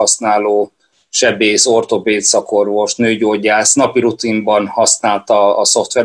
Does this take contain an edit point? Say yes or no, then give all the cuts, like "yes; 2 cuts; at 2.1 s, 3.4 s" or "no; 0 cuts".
no; 0 cuts